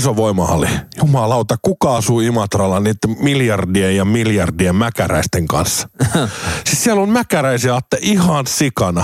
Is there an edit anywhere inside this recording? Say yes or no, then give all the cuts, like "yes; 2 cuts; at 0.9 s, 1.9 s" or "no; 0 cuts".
no; 0 cuts